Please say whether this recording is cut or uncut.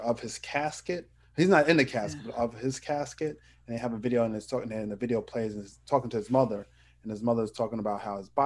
uncut